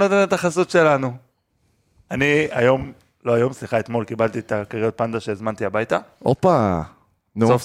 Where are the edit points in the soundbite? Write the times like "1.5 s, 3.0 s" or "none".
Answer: none